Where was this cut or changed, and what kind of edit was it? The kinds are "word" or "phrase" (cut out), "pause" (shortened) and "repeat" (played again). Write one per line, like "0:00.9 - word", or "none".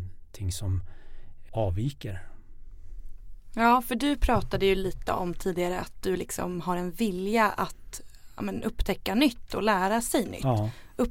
0:01.5 - word